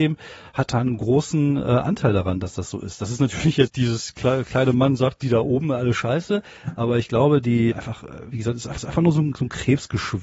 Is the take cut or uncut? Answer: cut